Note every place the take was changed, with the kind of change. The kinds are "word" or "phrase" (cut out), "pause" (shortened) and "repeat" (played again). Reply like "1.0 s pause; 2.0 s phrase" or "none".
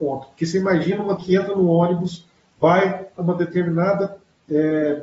1.2 s word; 3.2 s word